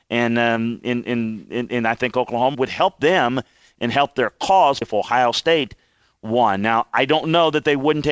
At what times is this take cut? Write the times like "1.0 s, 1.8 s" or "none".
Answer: 2.5 s, 4.8 s